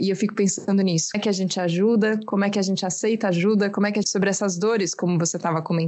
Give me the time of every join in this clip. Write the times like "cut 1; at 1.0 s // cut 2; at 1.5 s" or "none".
cut 1; at 1.1 s // cut 2; at 4.0 s